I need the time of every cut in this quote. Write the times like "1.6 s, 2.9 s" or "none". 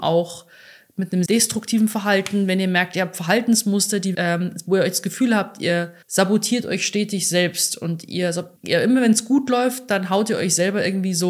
1.3 s, 4.1 s, 6.0 s, 8.6 s